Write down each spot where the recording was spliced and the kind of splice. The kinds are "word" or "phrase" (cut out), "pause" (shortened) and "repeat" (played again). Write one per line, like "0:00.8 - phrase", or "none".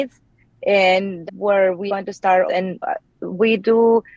0:01.3 - word
0:01.9 - word
0:02.5 - phrase
0:02.8 - word